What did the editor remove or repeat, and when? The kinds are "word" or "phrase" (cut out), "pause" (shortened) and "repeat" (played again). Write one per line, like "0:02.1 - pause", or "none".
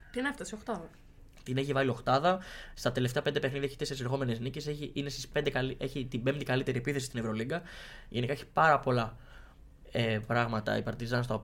none